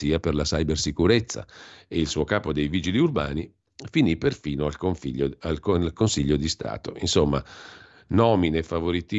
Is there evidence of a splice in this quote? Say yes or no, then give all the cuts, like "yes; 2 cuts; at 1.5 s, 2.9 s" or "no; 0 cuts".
no; 0 cuts